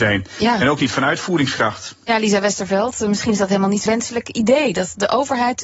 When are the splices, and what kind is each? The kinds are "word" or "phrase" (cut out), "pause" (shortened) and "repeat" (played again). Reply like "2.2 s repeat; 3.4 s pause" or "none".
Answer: 3.9 s word